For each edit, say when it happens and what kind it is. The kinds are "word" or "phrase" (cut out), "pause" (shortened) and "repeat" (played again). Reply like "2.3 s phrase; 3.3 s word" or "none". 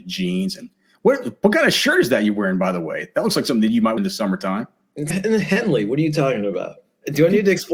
4.0 s word; 5.1 s word